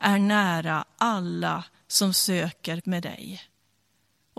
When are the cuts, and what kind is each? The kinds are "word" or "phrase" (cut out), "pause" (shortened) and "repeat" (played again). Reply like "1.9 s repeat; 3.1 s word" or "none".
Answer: 2.8 s word